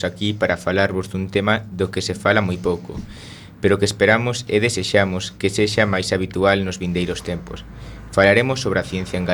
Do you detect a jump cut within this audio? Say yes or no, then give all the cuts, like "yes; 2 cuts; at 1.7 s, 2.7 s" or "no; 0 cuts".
no; 0 cuts